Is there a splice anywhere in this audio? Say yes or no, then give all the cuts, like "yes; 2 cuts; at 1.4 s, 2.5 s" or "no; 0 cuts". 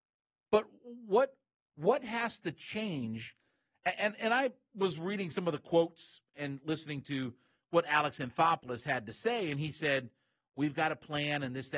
no; 0 cuts